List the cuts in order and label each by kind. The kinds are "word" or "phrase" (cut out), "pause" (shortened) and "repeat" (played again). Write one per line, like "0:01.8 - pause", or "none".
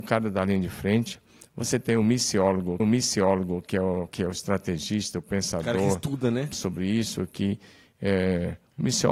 0:02.8 - repeat
0:04.1 - word
0:06.5 - word